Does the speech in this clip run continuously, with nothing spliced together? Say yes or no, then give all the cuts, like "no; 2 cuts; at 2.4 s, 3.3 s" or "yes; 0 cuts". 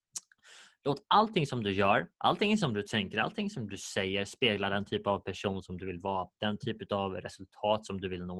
no; 1 cut; at 2.1 s